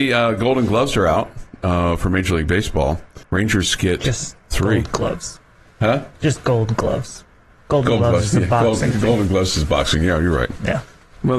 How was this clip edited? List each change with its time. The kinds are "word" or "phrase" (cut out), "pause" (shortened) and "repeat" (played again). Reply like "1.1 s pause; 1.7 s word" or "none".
3.2 s pause